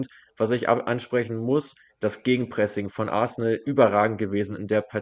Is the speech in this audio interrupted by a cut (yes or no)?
no